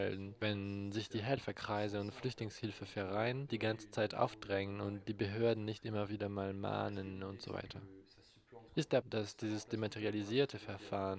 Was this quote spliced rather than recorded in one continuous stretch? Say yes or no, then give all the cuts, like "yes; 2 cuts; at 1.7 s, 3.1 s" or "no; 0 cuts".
yes; 2 cuts; at 3.5 s, 9.0 s